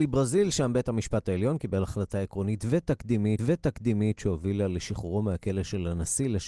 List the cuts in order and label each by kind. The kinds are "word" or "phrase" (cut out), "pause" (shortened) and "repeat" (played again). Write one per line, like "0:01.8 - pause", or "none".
0:03.4 - repeat